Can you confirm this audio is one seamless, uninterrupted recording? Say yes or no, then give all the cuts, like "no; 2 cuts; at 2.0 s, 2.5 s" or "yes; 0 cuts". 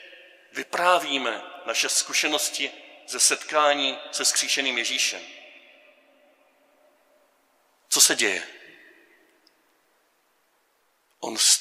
yes; 0 cuts